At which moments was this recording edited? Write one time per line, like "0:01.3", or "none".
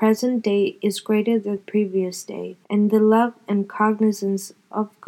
0:01.6
0:02.6